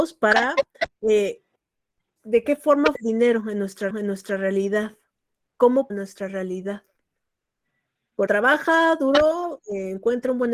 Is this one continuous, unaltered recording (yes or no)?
no